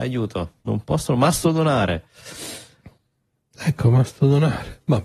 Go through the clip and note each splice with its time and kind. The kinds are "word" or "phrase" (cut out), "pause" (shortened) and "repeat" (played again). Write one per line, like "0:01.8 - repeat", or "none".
none